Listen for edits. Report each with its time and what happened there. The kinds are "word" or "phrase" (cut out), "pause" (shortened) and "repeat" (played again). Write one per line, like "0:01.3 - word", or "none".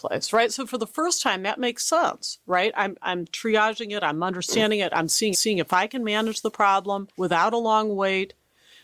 0:05.3 - repeat
0:07.1 - pause